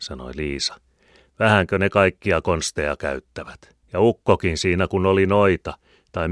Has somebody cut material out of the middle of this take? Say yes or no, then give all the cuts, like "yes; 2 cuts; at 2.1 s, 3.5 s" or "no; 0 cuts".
yes; 1 cut; at 3.8 s